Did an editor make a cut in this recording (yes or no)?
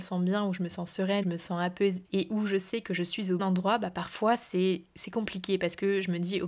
yes